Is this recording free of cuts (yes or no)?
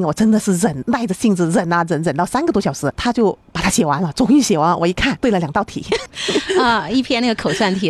yes